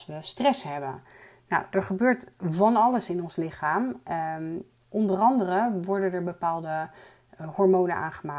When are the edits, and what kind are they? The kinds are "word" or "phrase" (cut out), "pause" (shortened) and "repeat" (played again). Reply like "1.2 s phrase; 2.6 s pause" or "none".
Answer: none

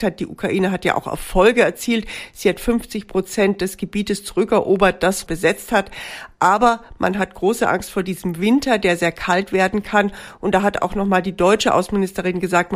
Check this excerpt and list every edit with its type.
5.3 s word

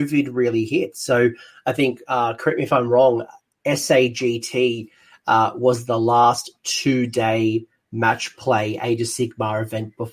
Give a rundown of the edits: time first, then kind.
none

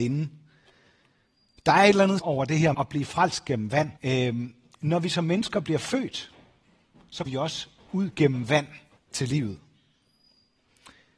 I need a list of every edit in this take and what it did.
2.2 s word; 2.7 s word; 4.0 s pause; 7.3 s word; 9.0 s pause

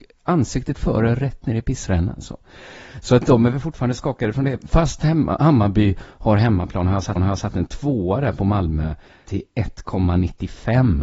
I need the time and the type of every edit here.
7.2 s repeat; 9.3 s word

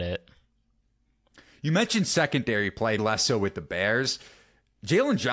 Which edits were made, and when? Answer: 3.0 s word

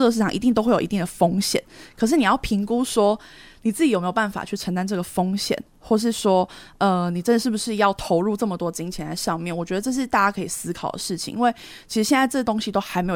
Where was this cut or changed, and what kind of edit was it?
none

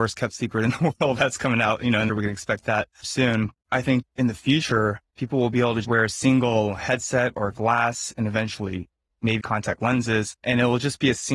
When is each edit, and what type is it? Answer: 2.1 s phrase; 3.0 s word; 3.5 s pause; 4.1 s pause; 5.8 s word; 9.4 s word; 10.4 s pause

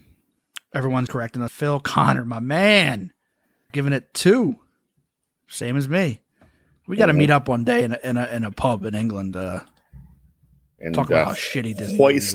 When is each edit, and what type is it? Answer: 1.1 s word; 1.5 s word; 3.7 s word; 9.3 s word

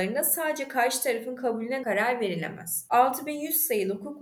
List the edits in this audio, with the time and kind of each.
1.8 s word

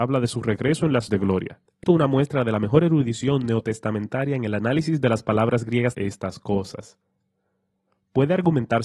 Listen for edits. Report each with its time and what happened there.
1.1 s word; 1.8 s word; 5.9 s phrase

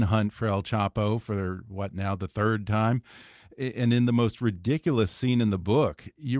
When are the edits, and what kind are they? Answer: none

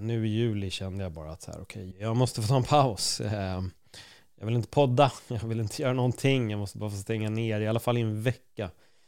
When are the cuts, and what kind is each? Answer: 1.9 s word

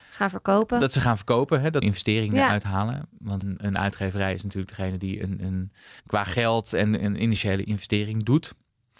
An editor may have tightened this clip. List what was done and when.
1.8 s phrase; 3.4 s word; 6.0 s pause

